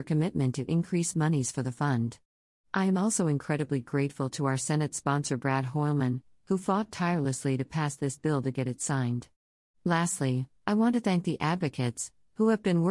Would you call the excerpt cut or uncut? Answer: uncut